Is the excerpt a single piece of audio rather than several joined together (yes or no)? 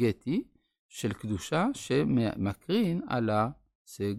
yes